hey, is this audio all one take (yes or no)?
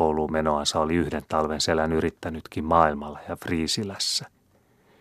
yes